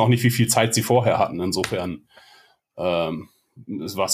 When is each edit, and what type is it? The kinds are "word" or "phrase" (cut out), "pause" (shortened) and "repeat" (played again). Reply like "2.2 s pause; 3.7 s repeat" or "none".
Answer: none